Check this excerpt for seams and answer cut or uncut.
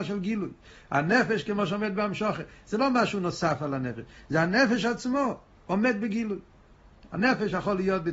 uncut